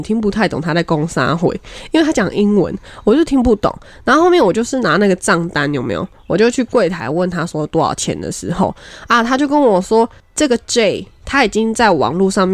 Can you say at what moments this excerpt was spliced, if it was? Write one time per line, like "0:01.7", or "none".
none